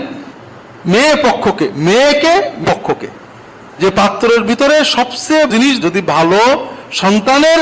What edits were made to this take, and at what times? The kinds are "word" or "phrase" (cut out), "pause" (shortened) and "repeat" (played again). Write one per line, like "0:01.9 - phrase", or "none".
0:02.6 - word
0:05.5 - word
0:05.8 - word